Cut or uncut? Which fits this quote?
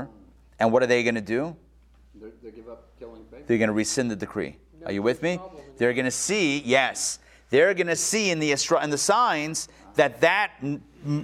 uncut